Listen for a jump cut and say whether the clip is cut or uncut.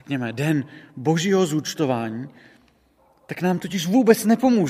uncut